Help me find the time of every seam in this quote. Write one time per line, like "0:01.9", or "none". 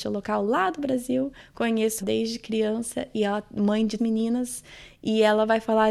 0:02.0
0:04.0